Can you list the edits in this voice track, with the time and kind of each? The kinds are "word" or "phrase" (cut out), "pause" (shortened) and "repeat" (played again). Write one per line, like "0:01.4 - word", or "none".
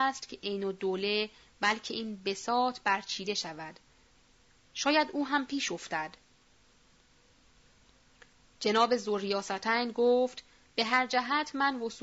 none